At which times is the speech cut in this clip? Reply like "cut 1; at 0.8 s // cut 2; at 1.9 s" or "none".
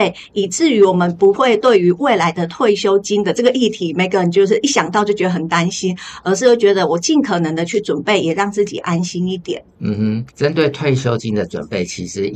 cut 1; at 10.3 s